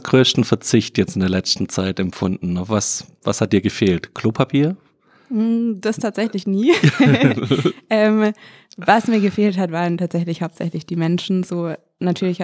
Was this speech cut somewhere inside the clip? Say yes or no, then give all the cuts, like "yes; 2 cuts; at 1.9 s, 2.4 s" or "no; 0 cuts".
no; 0 cuts